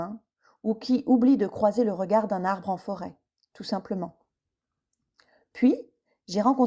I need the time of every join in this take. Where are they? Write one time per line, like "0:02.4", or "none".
none